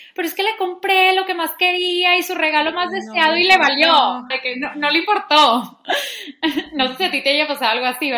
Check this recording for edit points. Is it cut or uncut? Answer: cut